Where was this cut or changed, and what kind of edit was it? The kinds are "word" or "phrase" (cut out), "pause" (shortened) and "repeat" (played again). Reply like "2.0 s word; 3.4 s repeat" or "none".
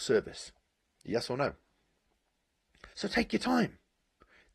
2.9 s pause